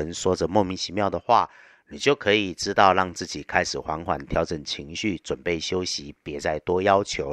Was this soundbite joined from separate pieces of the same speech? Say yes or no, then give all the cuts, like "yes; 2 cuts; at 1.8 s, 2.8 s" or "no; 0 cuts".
no; 0 cuts